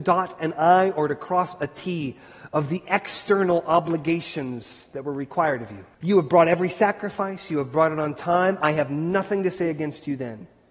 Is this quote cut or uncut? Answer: cut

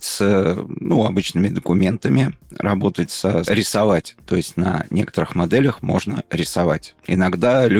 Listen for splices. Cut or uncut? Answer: cut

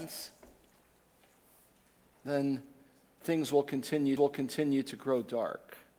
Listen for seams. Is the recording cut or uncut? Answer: cut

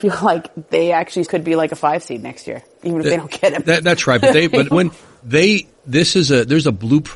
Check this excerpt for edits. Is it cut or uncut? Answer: cut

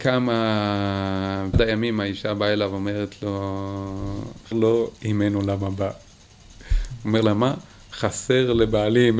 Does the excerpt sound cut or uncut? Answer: cut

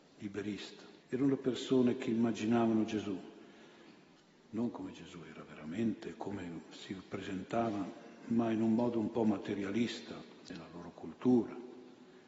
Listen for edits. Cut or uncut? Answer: cut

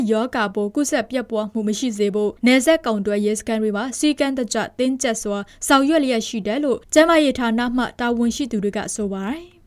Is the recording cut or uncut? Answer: cut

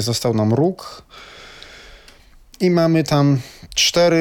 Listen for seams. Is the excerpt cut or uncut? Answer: uncut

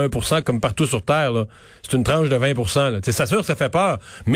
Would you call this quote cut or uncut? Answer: uncut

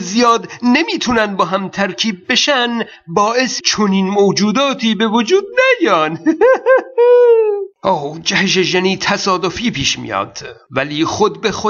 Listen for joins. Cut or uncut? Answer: cut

